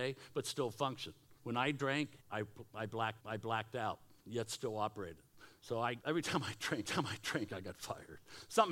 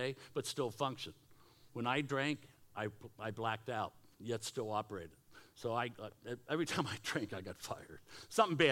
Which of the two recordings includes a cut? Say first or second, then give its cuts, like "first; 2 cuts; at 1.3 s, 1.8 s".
first; 5 cuts; at 1.4 s, 2.2 s, 3.2 s, 6.0 s, 6.9 s